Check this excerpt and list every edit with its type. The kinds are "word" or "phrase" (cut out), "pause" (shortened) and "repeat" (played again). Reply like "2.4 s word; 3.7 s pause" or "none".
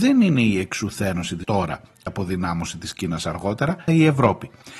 1.4 s word; 2.1 s word; 3.9 s word

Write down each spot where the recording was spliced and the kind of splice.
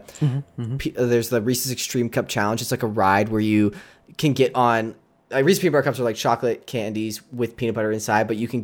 none

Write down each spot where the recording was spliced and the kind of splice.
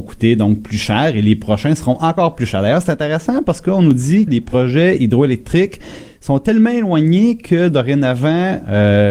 4.3 s word

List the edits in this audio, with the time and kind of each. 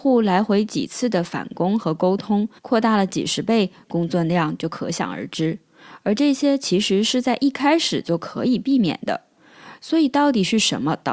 2.6 s pause

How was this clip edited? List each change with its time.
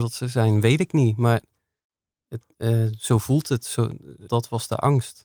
4.3 s word

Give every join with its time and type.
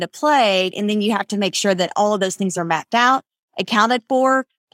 none

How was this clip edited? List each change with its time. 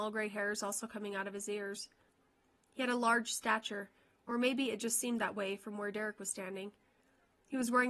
none

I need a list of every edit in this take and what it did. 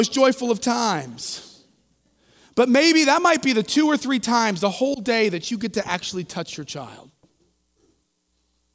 none

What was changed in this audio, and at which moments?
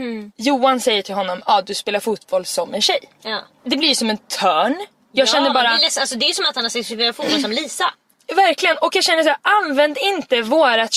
none

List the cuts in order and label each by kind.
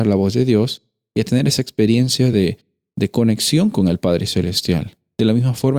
none

